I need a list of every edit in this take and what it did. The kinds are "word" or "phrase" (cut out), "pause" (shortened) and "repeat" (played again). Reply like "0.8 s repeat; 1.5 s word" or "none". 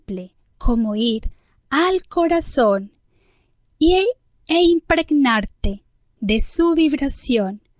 none